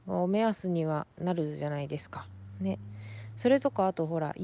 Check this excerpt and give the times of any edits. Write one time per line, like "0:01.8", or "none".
0:01.1